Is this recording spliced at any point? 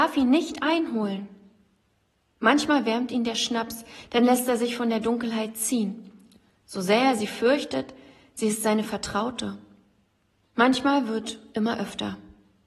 no; 0 cuts

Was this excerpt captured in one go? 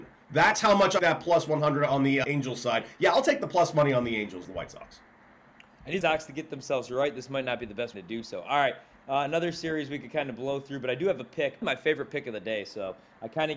no; 6 cuts; at 1.0 s, 2.2 s, 4.4 s, 6.0 s, 7.9 s, 11.6 s

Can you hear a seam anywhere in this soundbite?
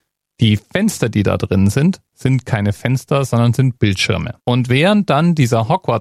yes; 1 cut; at 4.4 s

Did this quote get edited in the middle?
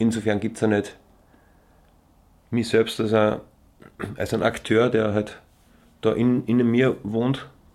no; 0 cuts

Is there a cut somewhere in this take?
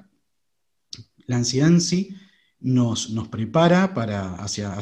no; 0 cuts

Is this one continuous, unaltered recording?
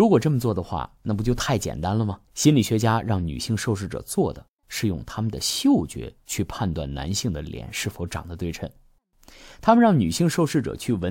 no; 1 cut; at 2.3 s

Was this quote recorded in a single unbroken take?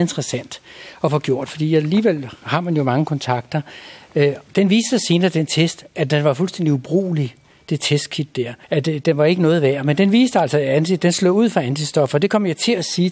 no; 2 cuts; at 4.5 s, 8.6 s

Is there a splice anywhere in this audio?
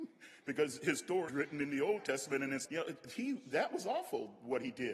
yes; 2 cuts; at 1.3 s, 2.7 s

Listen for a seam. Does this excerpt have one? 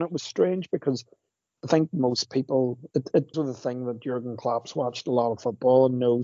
yes; 2 cuts; at 2.9 s, 3.3 s

